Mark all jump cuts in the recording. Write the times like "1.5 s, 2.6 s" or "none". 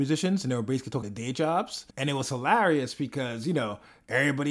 1.0 s, 1.9 s